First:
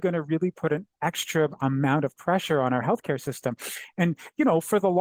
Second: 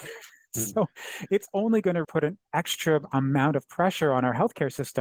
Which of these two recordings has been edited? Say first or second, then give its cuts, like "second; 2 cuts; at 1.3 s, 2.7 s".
second; 1 cut; at 2.0 s